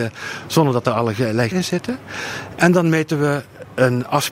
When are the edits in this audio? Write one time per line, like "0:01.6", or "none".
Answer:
0:01.5